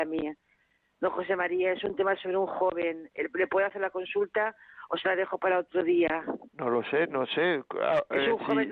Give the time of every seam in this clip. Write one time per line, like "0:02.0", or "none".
0:06.5